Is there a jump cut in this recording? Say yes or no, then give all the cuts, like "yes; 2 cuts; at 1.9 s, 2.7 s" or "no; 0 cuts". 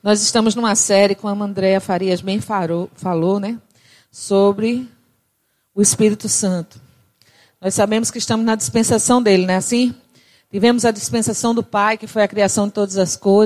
no; 0 cuts